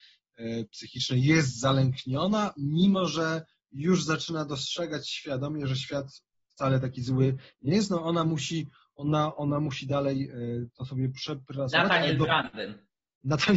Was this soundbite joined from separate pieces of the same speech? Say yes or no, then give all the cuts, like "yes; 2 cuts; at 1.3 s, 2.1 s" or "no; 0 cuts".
no; 0 cuts